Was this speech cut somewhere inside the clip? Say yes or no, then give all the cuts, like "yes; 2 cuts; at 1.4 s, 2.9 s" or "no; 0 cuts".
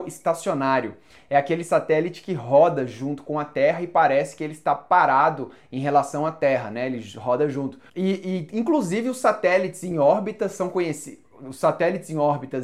no; 0 cuts